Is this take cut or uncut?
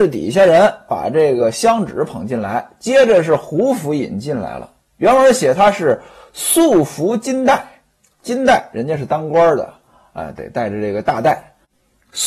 uncut